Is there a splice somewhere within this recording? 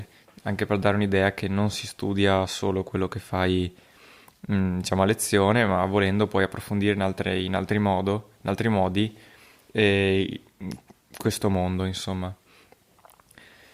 no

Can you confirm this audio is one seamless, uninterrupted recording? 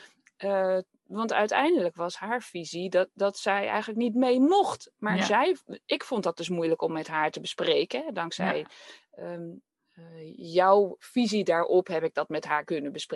yes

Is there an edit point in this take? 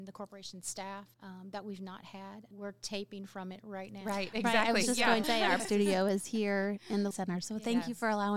yes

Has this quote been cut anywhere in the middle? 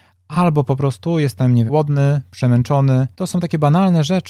yes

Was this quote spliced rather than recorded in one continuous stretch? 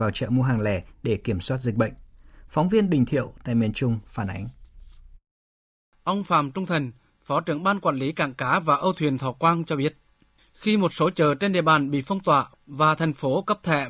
no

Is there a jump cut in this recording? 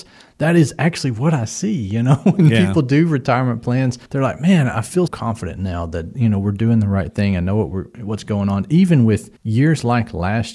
yes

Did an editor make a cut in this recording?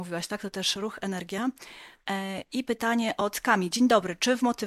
no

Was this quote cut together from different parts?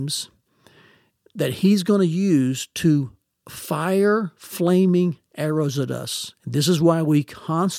no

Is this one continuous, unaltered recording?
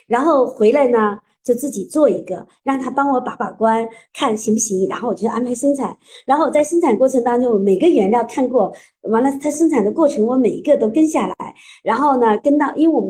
yes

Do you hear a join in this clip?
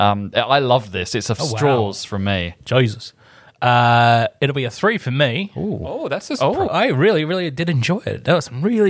yes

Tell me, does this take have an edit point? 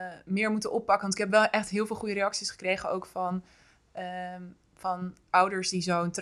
no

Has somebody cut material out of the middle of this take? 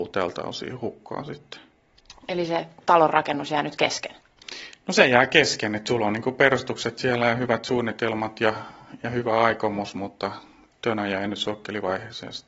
no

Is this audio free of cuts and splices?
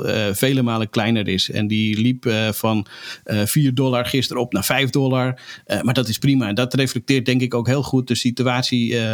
yes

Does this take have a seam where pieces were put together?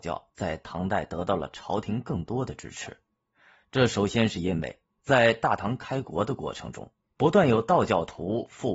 no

